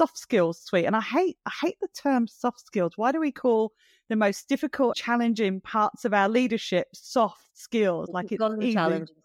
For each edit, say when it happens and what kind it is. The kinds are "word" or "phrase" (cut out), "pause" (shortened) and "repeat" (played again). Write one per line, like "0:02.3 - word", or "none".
0:04.9 - word